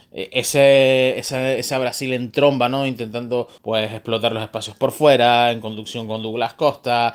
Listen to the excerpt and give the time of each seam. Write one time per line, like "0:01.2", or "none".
0:03.6

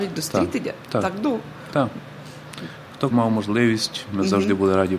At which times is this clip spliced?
0:03.1

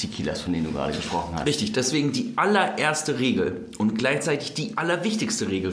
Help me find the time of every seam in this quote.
none

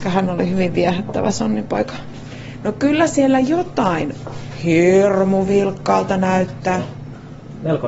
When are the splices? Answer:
none

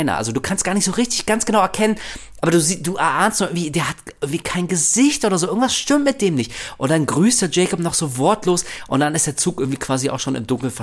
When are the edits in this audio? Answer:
none

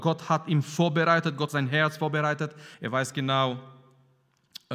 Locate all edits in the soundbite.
0:01.5
0:02.7
0:03.1

